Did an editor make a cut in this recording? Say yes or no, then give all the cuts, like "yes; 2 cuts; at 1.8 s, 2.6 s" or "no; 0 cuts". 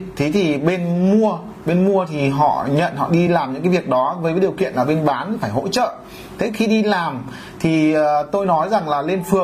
no; 0 cuts